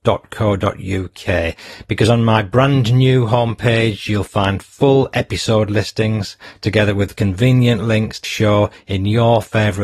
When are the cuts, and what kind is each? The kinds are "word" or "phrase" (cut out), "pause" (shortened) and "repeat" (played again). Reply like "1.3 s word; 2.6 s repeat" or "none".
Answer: 8.2 s phrase